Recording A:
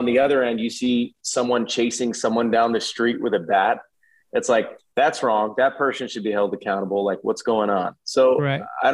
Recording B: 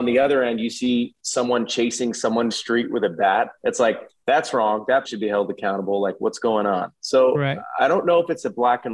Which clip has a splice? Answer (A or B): B